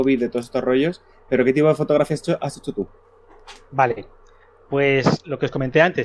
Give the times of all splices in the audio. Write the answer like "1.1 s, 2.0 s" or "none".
none